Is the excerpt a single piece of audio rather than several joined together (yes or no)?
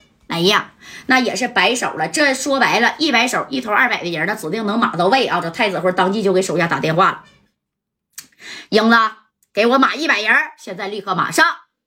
yes